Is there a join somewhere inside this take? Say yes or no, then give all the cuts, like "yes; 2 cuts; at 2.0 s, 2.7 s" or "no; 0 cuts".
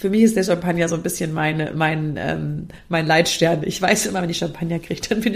no; 0 cuts